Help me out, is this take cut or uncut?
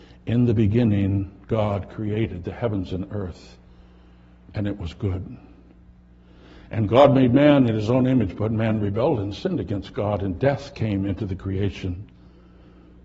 uncut